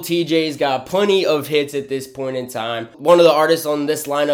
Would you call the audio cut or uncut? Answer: uncut